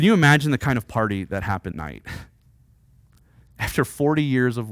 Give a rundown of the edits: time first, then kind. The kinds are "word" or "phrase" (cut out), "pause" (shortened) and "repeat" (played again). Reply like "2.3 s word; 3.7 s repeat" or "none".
1.7 s word